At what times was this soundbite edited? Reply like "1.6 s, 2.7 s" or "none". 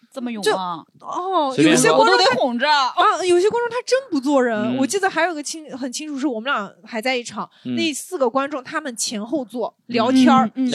none